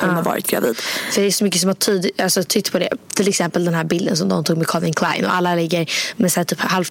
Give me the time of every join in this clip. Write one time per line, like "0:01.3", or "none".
none